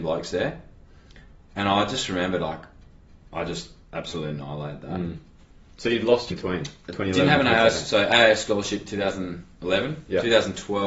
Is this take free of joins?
no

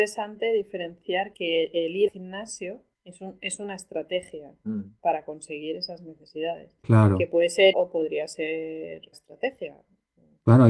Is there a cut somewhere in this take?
yes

